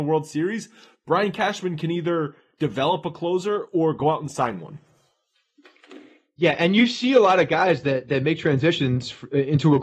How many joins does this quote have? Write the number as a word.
zero